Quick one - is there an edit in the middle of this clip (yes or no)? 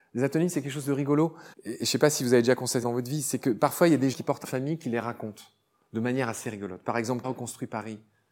yes